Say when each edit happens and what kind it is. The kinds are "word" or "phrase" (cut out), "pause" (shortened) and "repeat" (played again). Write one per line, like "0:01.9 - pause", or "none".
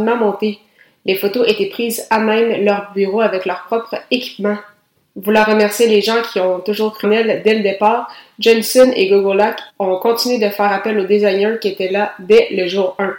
0:07.0 - word
0:09.7 - pause